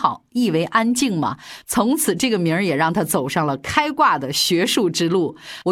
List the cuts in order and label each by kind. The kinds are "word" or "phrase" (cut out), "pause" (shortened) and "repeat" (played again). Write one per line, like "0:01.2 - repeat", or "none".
none

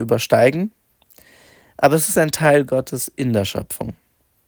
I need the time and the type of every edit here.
none

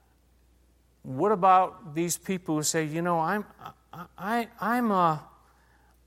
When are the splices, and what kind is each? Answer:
none

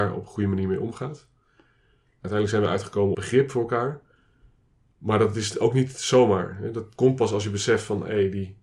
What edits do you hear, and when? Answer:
0:03.1 - word

